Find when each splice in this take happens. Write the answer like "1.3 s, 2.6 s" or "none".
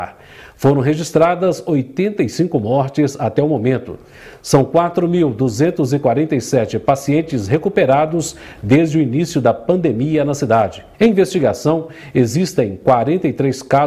10.9 s